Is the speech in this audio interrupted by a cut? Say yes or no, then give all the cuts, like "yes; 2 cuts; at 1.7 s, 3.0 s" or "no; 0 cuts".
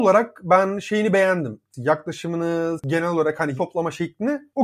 yes; 2 cuts; at 2.8 s, 3.6 s